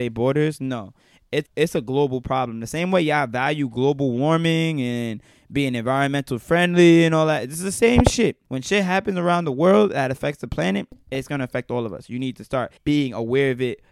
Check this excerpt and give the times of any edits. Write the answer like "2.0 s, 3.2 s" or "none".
1.5 s, 8.5 s, 12.8 s